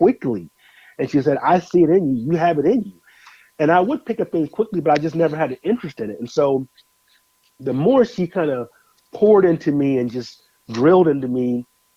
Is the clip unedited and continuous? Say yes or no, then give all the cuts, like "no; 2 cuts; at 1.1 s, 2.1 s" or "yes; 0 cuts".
yes; 0 cuts